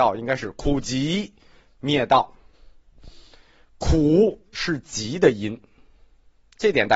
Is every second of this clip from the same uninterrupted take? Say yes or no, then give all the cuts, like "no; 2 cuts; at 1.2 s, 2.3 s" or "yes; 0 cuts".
yes; 0 cuts